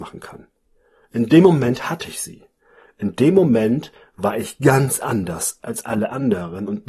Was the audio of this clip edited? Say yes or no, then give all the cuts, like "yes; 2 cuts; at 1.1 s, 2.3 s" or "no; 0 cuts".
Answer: no; 0 cuts